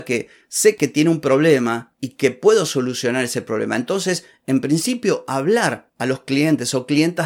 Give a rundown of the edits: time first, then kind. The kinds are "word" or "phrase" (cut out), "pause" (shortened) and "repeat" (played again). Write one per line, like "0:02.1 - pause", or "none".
none